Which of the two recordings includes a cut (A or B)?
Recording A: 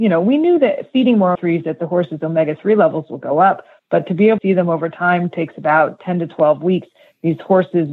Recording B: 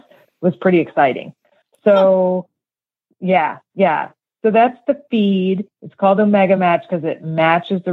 A